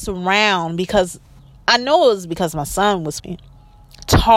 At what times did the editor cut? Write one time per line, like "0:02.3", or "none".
0:03.2